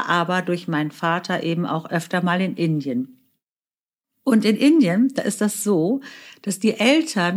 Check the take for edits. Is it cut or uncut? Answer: uncut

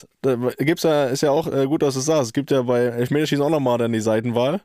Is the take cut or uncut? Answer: uncut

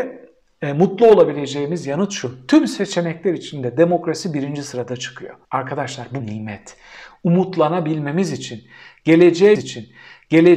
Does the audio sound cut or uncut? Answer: cut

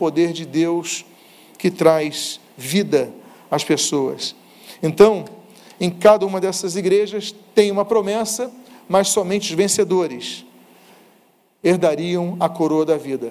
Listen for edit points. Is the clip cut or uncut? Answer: uncut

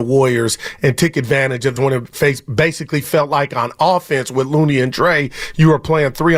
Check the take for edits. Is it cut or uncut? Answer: cut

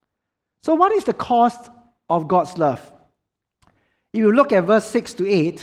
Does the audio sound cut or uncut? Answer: uncut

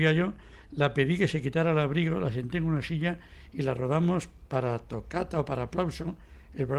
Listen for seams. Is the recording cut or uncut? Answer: uncut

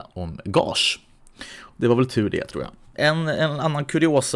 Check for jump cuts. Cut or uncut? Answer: uncut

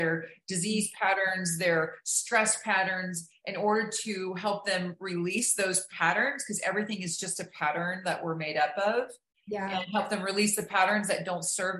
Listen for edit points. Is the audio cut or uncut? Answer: uncut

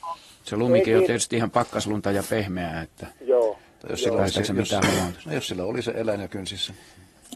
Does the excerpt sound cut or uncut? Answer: cut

